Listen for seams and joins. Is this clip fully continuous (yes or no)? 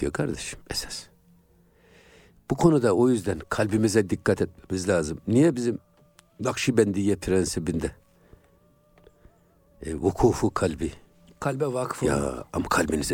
yes